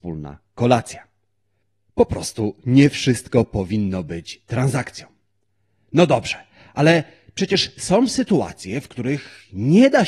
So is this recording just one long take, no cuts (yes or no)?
yes